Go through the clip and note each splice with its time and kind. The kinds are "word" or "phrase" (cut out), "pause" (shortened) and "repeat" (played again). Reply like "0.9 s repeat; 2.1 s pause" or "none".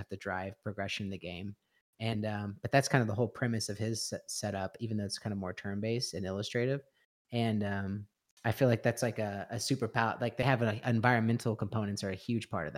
none